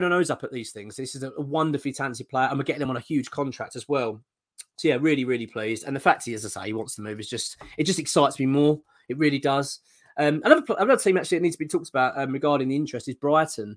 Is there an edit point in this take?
no; 0 cuts

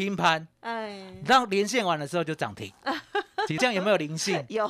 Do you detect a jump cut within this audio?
yes; 1 cut; at 3.6 s

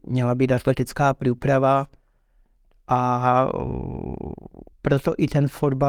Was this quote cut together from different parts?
yes; 1 cut; at 4.7 s

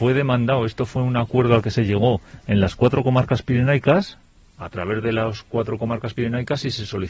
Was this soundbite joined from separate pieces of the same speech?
no; 0 cuts

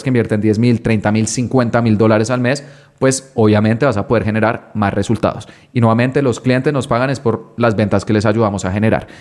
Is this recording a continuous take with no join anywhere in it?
yes; 0 cuts

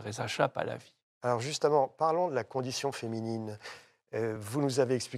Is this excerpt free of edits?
yes; 0 cuts

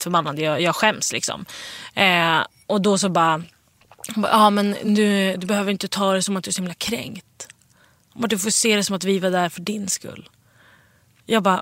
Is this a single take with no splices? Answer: yes; 0 cuts

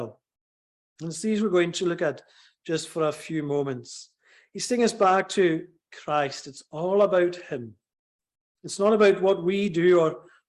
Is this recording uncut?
yes; 0 cuts

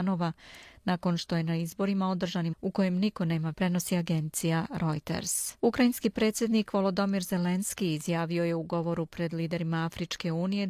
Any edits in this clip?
yes; 3 cuts; at 2.5 s, 3.5 s, 5.6 s

